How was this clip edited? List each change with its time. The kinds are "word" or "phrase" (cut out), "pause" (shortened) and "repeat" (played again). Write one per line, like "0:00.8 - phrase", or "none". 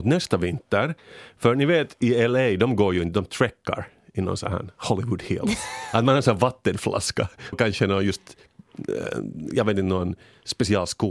0:07.5 - word